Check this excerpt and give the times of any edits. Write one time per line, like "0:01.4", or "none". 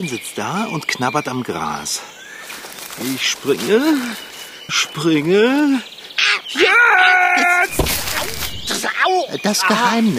0:04.7